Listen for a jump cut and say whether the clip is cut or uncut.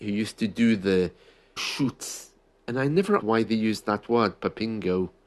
cut